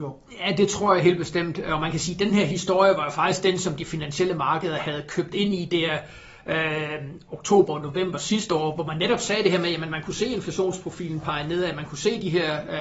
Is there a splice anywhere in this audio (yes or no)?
no